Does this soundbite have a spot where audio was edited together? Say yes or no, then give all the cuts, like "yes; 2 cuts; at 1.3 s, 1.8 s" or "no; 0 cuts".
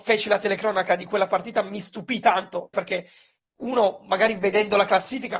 yes; 1 cut; at 2.7 s